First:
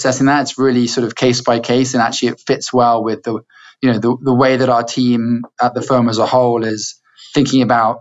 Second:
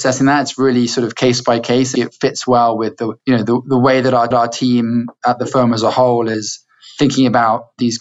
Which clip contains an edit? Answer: second; 3 cuts; at 2.0 s, 3.2 s, 4.3 s

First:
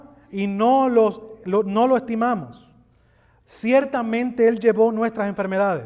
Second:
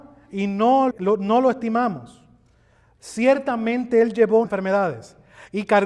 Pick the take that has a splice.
second; 2 cuts; at 0.9 s, 4.4 s

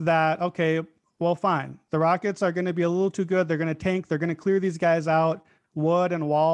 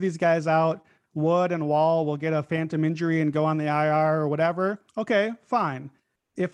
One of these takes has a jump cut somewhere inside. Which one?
second; 1 cut; at 4.9 s

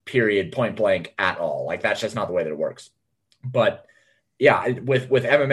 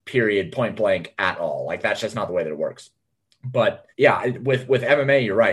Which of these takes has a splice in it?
second; 1 cut; at 3.9 s

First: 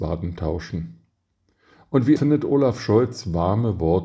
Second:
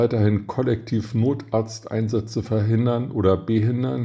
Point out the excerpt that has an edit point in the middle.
first; 1 cut; at 2.2 s

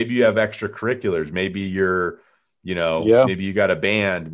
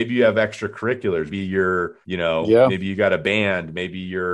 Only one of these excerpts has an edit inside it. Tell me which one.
second; 2 cuts; at 1.3 s, 2.0 s

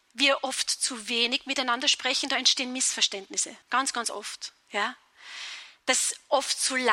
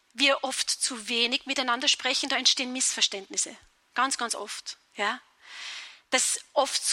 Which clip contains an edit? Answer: first; 1 cut; at 3.6 s

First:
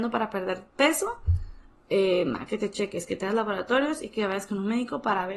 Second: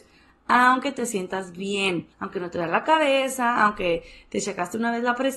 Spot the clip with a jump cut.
second; 1 cut; at 2.1 s

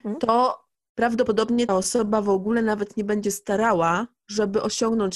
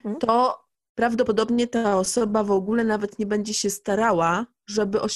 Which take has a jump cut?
first; 2 cuts; at 1.7 s, 3.2 s

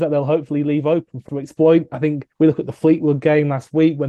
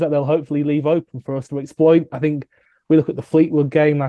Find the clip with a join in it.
first; 2 cuts; at 1.3 s, 2.3 s

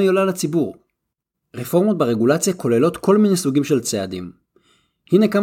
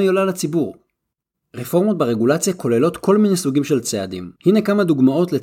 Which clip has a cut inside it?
second; 1 cut; at 4.4 s

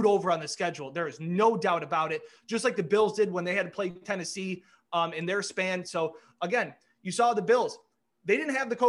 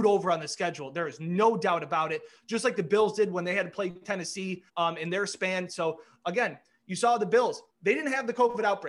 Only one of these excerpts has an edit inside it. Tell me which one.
second; 2 cuts; at 4.7 s, 7.7 s

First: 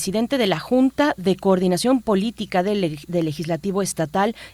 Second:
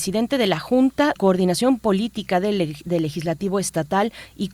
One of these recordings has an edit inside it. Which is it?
second; 1 cut; at 1.2 s

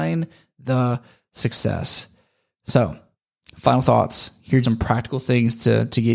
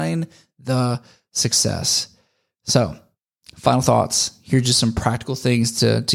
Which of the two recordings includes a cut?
first; 1 cut; at 4.6 s

